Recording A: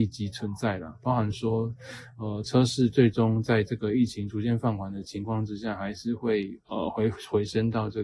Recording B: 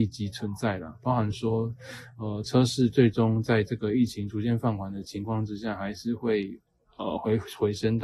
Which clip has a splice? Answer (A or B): A